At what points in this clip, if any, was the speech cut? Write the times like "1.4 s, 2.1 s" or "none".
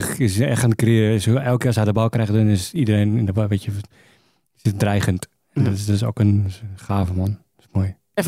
none